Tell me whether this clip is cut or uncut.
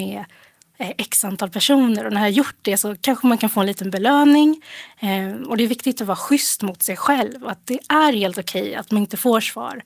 uncut